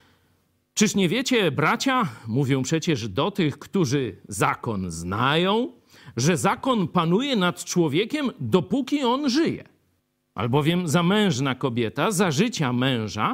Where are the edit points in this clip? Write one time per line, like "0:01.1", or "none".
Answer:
0:10.0